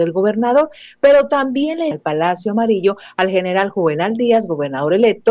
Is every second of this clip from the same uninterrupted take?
no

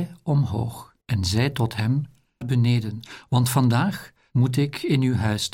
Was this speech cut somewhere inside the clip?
yes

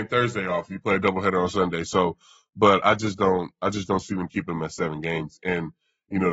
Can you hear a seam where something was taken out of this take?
no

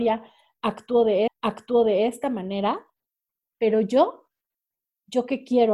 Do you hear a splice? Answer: yes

